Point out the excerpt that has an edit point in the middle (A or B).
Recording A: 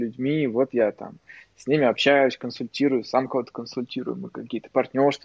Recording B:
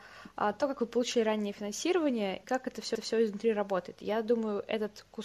B